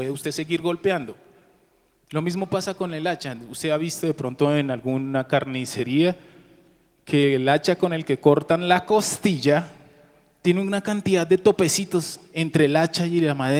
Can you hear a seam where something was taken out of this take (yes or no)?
no